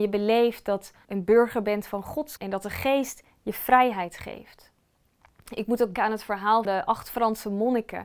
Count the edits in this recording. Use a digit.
4